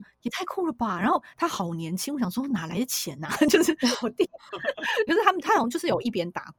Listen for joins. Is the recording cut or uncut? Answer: cut